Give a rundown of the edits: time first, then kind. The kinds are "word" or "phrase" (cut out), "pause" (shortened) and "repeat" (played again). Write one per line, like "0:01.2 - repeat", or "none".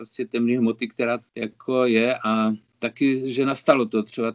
0:01.2 - word